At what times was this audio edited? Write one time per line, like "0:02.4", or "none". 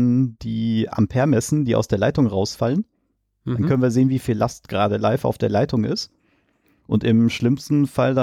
none